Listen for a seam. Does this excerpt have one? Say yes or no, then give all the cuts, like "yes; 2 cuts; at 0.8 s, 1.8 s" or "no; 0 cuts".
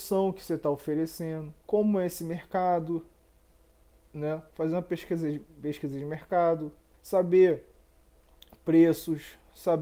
yes; 2 cuts; at 1.6 s, 6.9 s